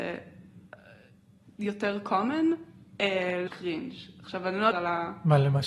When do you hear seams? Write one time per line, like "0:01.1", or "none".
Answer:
0:03.5
0:04.7